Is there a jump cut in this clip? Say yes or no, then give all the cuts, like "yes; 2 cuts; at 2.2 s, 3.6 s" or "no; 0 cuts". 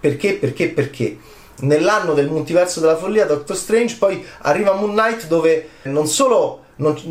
yes; 1 cut; at 5.9 s